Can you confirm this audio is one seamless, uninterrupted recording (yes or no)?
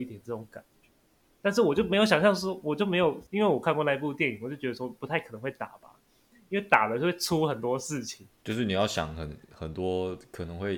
no